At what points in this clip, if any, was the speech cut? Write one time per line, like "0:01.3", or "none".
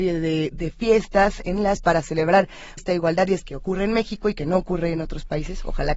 0:01.8
0:02.8
0:03.4

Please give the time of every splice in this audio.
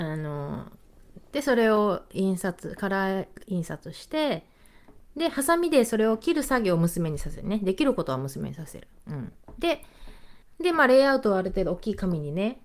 0:10.4

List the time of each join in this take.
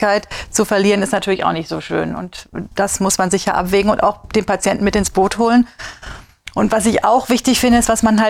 none

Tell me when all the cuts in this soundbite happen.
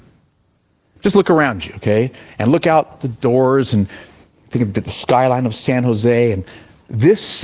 none

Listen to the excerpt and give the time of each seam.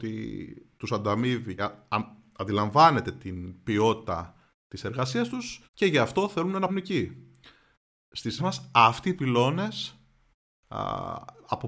0:01.6
0:04.5
0:05.6
0:06.7
0:08.4
0:09.2

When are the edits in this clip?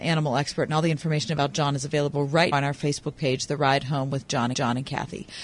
0:02.5
0:04.5

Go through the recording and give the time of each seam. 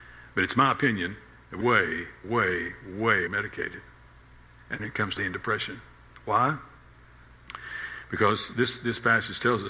0:01.6
0:02.2
0:03.3
0:04.8
0:05.2
0:08.5

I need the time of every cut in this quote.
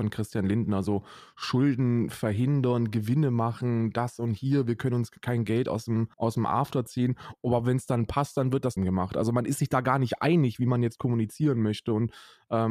0:06.1
0:08.8

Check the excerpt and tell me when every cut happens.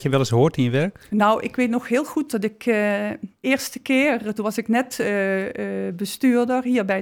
0:03.4

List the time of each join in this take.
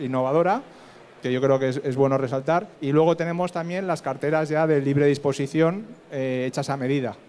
0:02.7

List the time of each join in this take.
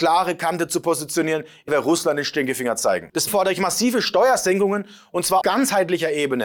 0:01.7
0:03.3
0:05.4

